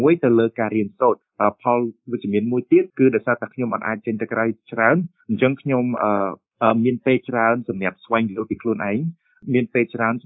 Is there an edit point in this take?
yes; 1 cut; at 2.9 s

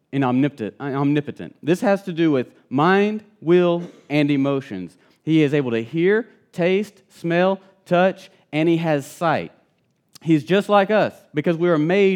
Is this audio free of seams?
yes; 0 cuts

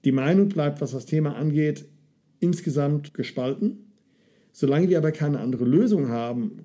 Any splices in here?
no; 0 cuts

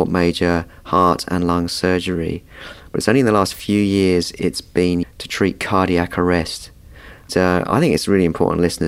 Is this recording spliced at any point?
yes; 2 cuts; at 5.0 s, 7.3 s

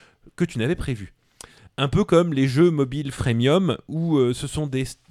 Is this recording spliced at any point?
no; 0 cuts

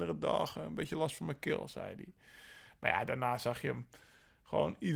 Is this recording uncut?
yes; 0 cuts

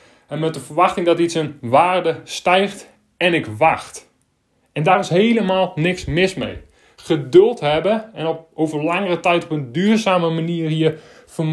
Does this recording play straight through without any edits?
yes; 0 cuts

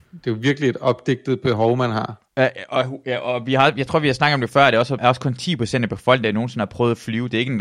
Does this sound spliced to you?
yes; 2 cuts; at 2.3 s, 5.0 s

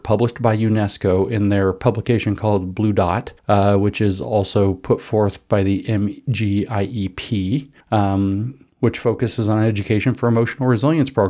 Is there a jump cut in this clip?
yes; 2 cuts; at 3.4 s, 7.8 s

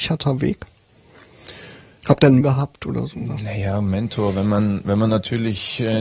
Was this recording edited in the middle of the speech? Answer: yes; 1 cut; at 2.4 s

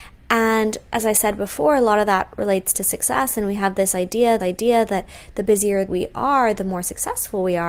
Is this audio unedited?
no; 2 cuts; at 4.4 s, 5.9 s

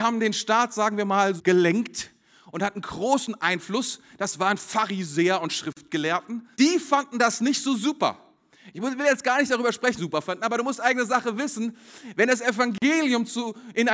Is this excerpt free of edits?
no; 3 cuts; at 1.4 s, 6.5 s, 10.0 s

